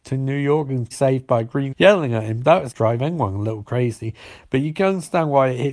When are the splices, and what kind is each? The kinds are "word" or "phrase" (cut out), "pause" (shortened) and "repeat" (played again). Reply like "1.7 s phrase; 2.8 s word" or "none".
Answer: 0.9 s word; 1.7 s phrase; 2.7 s word